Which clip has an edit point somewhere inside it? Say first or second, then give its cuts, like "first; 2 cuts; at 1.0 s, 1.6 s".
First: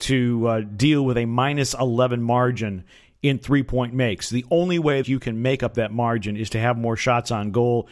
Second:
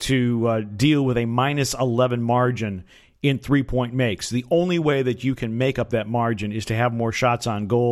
first; 1 cut; at 5.0 s